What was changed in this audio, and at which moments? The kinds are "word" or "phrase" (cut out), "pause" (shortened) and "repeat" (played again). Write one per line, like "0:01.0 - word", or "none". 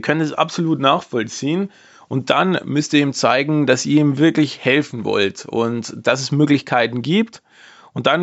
none